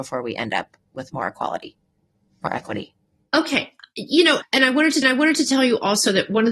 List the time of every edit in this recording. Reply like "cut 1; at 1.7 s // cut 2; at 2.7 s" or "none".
cut 1; at 4.4 s // cut 2; at 5.0 s